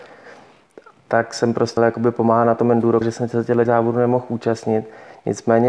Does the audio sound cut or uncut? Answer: cut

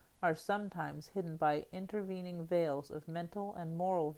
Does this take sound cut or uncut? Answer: uncut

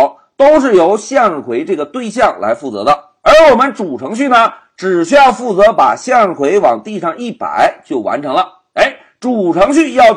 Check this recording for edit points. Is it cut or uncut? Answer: uncut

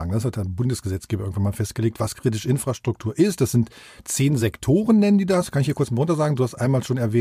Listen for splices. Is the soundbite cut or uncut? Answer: uncut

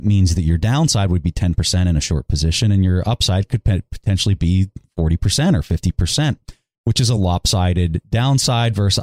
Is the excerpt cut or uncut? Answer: uncut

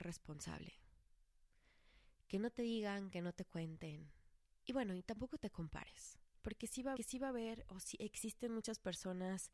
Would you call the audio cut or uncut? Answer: cut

